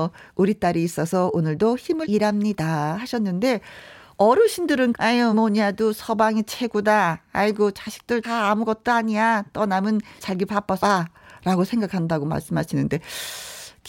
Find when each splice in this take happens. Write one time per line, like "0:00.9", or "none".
0:02.0
0:04.9
0:05.3
0:08.2
0:10.2
0:10.8

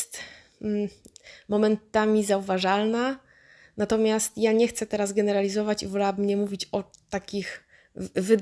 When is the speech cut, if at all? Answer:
none

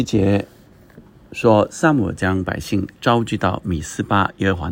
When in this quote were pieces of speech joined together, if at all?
none

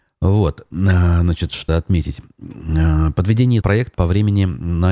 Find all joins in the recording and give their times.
0:01.7
0:03.6
0:03.9

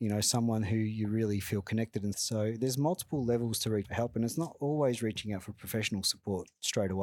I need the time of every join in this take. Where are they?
0:02.1
0:03.8

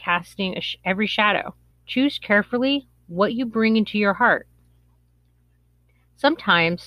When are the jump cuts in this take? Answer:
0:01.7

